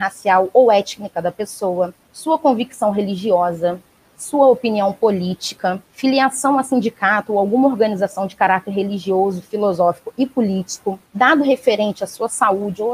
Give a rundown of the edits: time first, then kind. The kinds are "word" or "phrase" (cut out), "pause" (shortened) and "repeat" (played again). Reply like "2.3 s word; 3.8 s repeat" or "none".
2.0 s pause; 5.8 s pause; 11.1 s pause